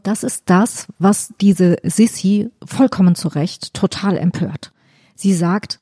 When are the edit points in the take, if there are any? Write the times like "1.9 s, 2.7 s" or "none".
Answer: none